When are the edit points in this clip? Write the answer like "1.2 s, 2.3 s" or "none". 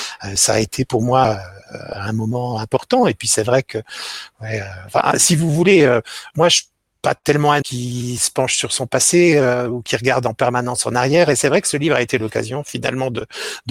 7.6 s